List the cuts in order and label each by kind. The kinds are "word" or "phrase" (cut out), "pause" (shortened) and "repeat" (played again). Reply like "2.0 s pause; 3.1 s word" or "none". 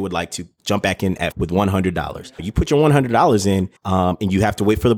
1.3 s word; 2.4 s word; 3.8 s pause